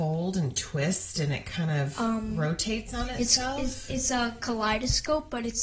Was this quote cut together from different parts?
no; 0 cuts

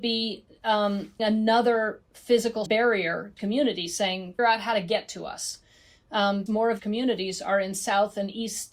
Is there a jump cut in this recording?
yes; 6 cuts; at 1.2 s, 2.7 s, 3.4 s, 4.4 s, 6.5 s, 6.8 s

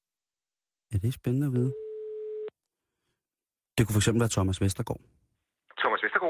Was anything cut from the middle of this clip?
no; 0 cuts

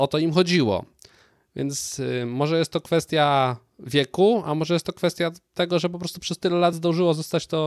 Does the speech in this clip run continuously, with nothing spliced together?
yes; 0 cuts

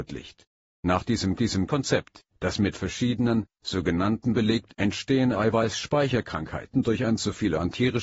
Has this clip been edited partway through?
yes; 3 cuts; at 1.4 s, 4.3 s, 4.7 s

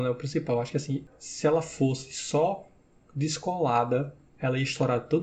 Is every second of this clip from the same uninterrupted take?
yes; 0 cuts

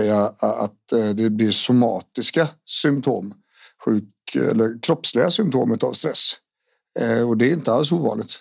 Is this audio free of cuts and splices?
yes; 0 cuts

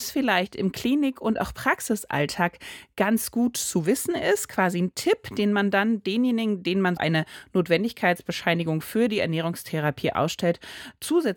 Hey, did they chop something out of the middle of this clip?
yes; 1 cut; at 7.0 s

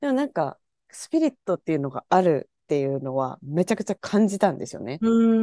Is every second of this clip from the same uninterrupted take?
no; 2 cuts; at 1.4 s, 4.0 s

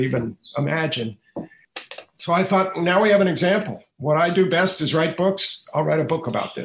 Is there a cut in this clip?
yes; 1 cut; at 3.9 s

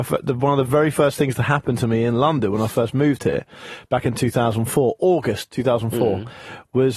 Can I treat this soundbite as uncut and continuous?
yes; 0 cuts

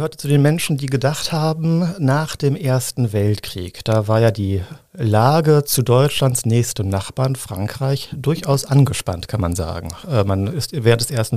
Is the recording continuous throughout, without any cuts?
no; 1 cut; at 4.8 s

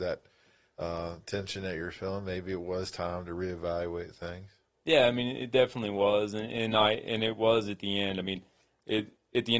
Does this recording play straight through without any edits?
yes; 0 cuts

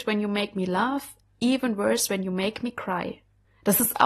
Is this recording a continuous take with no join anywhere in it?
yes; 0 cuts

